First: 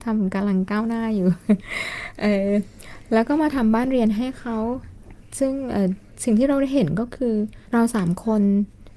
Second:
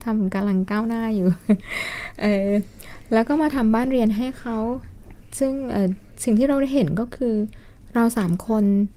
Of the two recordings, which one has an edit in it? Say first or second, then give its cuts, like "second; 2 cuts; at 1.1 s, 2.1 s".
first; 1 cut; at 7.7 s